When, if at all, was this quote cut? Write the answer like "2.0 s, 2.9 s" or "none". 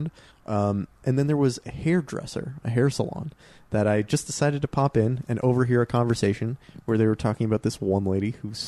none

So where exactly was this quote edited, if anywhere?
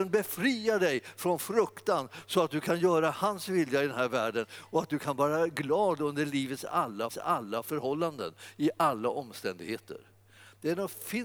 7.1 s

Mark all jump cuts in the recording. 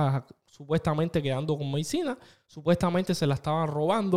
none

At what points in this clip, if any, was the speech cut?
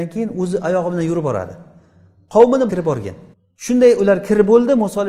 2.7 s, 3.3 s

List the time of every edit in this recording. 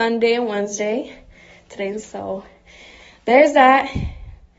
2.0 s

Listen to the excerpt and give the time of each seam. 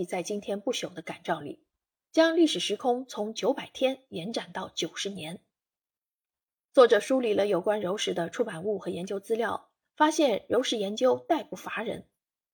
none

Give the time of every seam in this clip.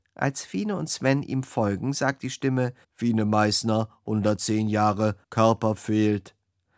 2.8 s, 5.2 s

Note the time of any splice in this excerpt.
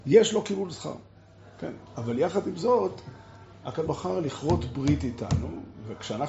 3.9 s

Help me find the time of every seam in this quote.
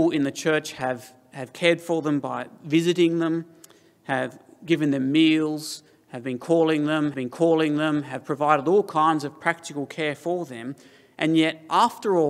7.1 s

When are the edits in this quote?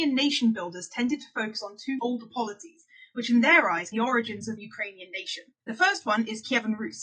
2.0 s, 3.9 s, 4.6 s, 5.6 s

